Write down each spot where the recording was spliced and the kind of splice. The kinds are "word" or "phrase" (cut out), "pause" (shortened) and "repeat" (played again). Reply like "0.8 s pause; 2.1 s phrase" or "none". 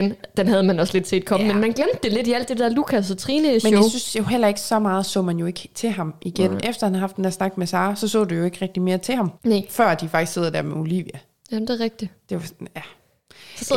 9.4 s pause

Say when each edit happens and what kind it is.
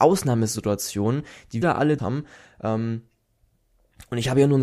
1.6 s word; 2.0 s word

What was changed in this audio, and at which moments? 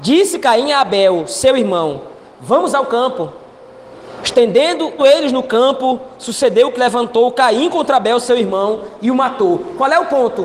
5.0 s word; 6.8 s word

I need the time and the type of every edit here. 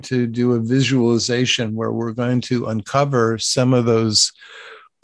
none

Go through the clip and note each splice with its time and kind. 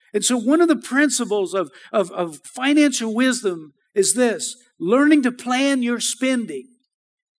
none

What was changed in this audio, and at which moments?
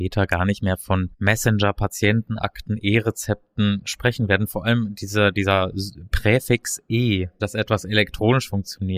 7.4 s word

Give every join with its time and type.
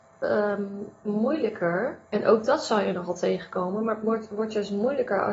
2.0 s pause

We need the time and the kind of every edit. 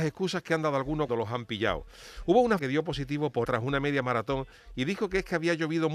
1.1 s word; 2.6 s word; 3.4 s word

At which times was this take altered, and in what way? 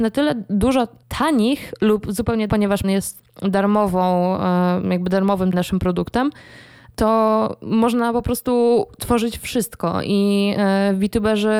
2.5 s word; 2.8 s word; 5.5 s word

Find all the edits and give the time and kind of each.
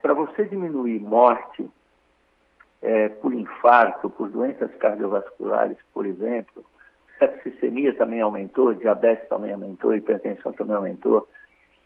none

